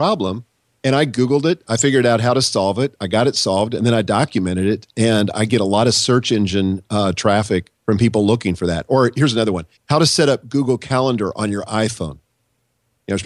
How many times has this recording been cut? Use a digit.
2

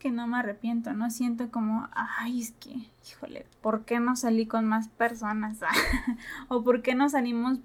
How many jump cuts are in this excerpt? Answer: 1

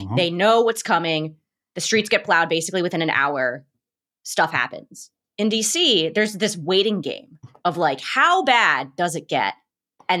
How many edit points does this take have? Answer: 0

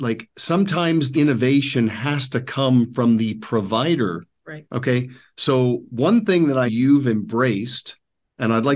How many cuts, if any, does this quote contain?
3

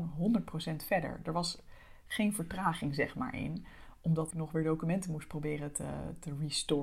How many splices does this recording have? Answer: 1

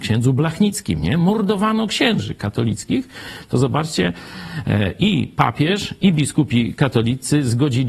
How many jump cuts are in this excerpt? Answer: 0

